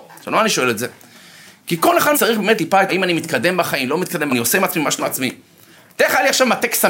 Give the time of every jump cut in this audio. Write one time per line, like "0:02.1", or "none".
0:02.1
0:02.6
0:02.9
0:04.3
0:05.0

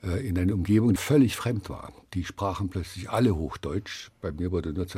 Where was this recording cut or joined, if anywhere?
0:01.0

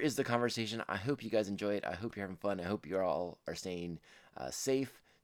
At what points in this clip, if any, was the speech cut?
none

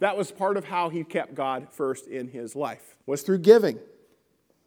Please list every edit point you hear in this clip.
0:03.0

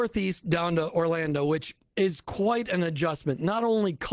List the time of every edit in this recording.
none

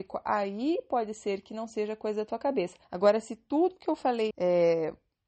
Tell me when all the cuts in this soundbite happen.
0:02.8
0:04.3

